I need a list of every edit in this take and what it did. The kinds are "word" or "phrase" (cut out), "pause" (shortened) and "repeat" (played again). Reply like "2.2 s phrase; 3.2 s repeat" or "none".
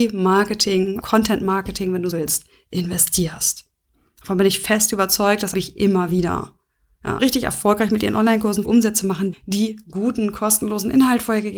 1.0 s word; 2.1 s word; 5.5 s word; 7.2 s word; 8.6 s word; 9.3 s word